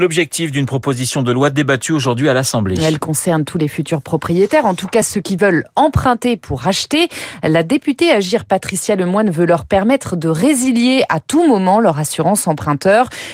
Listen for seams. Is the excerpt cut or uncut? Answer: uncut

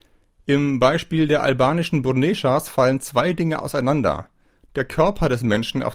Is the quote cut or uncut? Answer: uncut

